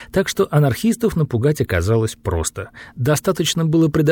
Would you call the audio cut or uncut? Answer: uncut